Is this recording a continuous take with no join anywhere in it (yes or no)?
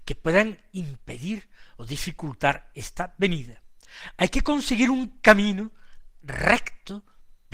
yes